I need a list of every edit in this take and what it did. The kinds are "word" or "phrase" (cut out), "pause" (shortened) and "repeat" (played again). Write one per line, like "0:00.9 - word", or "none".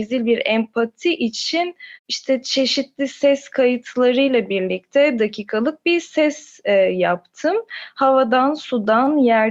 0:02.0 - pause
0:05.2 - word